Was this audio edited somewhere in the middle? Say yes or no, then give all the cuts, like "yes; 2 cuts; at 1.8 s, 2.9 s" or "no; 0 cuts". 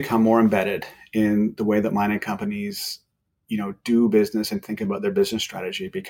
no; 0 cuts